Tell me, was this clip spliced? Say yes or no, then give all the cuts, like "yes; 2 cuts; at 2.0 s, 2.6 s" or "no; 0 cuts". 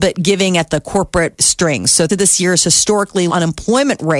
yes; 3 cuts; at 1.4 s, 2.1 s, 3.3 s